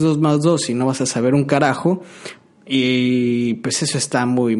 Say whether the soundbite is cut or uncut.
uncut